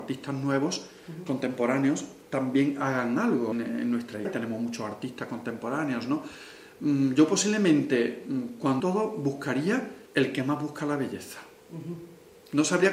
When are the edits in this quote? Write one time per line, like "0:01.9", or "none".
0:03.5
0:04.2
0:08.8
0:10.1